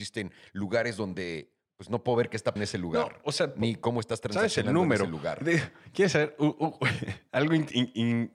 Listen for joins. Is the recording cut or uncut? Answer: cut